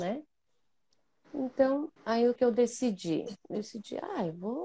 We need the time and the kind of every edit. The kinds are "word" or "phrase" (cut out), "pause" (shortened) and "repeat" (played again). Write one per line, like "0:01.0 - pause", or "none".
0:02.0 - pause
0:02.4 - word